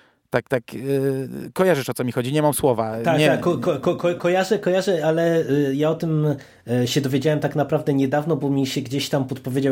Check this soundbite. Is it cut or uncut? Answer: uncut